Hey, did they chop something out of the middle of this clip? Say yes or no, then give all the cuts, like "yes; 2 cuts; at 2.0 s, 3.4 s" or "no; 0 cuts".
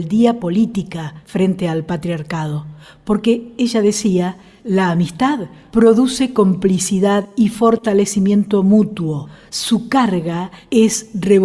no; 0 cuts